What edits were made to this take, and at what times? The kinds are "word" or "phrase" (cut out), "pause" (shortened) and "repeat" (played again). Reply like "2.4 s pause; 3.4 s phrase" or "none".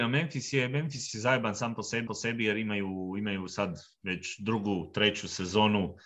2.1 s repeat